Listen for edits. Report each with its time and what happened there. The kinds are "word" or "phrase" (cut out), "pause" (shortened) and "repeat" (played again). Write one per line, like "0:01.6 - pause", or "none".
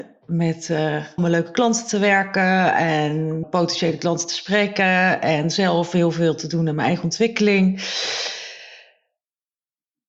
0:01.2 - word
0:03.4 - word